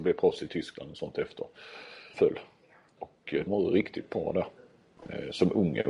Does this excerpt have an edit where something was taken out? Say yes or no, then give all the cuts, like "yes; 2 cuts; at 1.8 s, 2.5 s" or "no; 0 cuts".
yes; 2 cuts; at 2.1 s, 3.5 s